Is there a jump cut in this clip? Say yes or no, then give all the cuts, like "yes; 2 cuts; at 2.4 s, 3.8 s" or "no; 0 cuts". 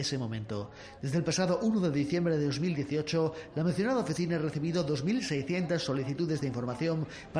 no; 0 cuts